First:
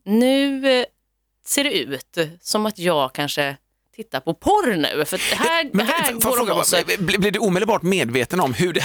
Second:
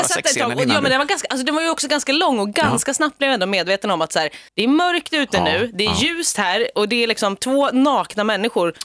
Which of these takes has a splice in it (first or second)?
second